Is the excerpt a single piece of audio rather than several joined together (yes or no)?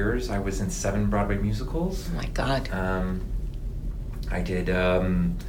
yes